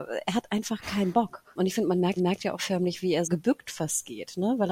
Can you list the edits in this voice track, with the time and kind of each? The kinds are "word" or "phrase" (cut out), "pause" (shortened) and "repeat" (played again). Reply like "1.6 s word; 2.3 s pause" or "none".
2.2 s repeat; 3.2 s word